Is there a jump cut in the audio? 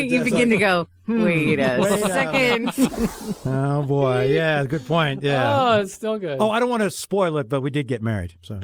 no; 0 cuts

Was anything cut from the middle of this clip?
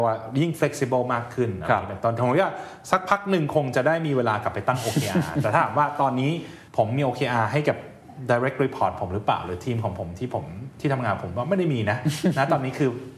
yes; 1 cut; at 6.7 s

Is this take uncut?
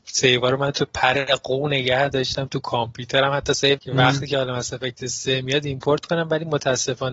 no; 1 cut; at 3.8 s

